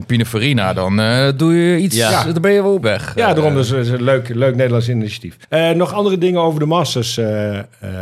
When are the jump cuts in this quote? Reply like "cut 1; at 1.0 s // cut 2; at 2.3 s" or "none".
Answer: cut 1; at 2.8 s // cut 2; at 5.4 s